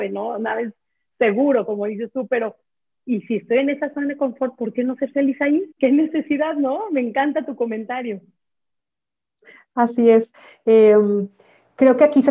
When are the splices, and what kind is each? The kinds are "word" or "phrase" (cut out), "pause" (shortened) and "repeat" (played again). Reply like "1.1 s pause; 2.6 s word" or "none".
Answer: 5.7 s pause